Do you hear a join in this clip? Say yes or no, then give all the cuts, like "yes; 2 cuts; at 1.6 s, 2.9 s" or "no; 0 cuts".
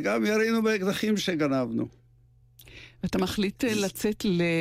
no; 0 cuts